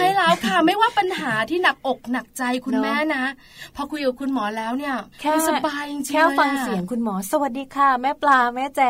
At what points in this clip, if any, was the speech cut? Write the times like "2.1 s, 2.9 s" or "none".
5.1 s